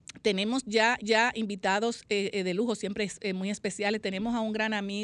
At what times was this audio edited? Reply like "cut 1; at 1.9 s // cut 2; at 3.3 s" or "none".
cut 1; at 1.0 s